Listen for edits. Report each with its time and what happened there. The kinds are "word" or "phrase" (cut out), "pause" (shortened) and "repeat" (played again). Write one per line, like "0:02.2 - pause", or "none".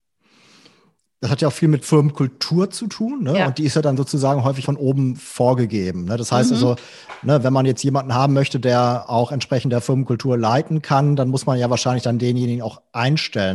0:01.8 - word
0:04.6 - word

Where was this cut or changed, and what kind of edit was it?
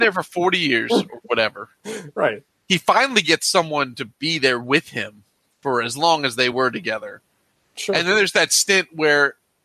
none

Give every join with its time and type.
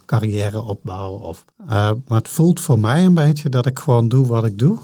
0:01.5 - pause

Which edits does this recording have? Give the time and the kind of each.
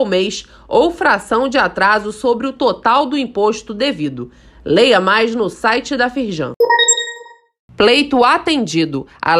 none

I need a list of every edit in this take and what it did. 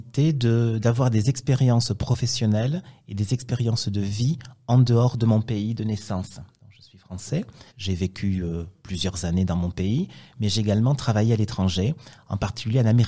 0:07.7 - pause

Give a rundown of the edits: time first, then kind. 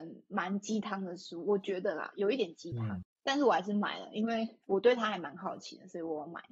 0:03.0 - word
0:04.6 - pause

